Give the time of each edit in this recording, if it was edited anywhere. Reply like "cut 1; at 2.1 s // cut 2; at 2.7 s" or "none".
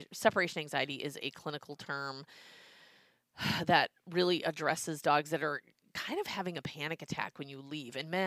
none

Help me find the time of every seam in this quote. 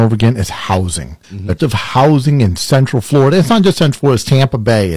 cut 1; at 1.2 s // cut 2; at 1.6 s

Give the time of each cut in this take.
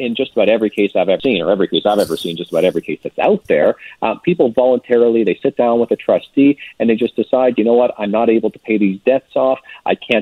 none

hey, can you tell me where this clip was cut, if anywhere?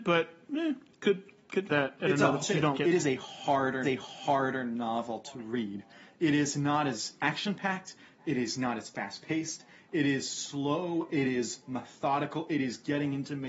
cut 1; at 1.7 s // cut 2; at 2.4 s // cut 3; at 2.7 s // cut 4; at 3.8 s

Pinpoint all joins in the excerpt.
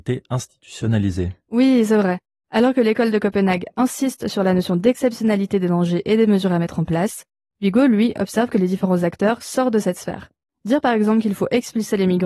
none

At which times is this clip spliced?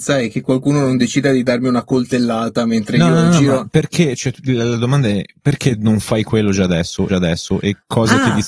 cut 1; at 7.1 s

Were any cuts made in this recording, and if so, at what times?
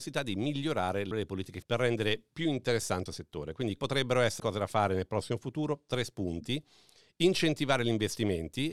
cut 1; at 1.1 s // cut 2; at 1.6 s // cut 3; at 3.1 s // cut 4; at 3.8 s // cut 5; at 4.4 s

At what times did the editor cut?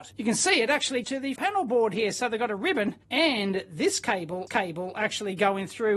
cut 1; at 1.0 s // cut 2; at 1.4 s // cut 3; at 3.0 s // cut 4; at 4.5 s

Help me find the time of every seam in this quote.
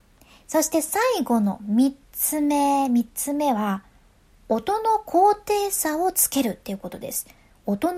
none

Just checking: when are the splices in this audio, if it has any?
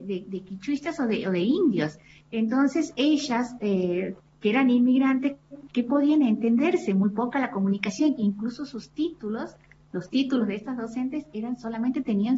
none

